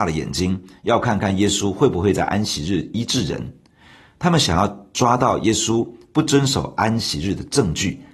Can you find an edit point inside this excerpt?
no; 0 cuts

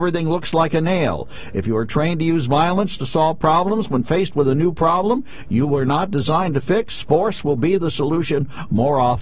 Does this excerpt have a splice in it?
no; 0 cuts

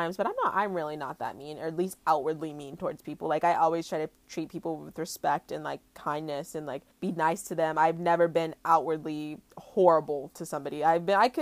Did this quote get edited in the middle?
yes; 2 cuts; at 6.9 s, 9.5 s

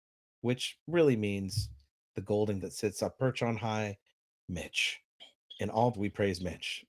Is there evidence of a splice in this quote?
yes; 2 cuts; at 2.6 s, 5.9 s

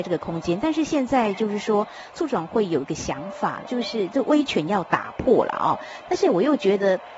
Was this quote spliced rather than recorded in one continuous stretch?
yes; 1 cut; at 3.6 s

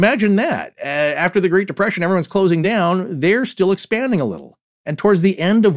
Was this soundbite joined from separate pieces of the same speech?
no; 0 cuts

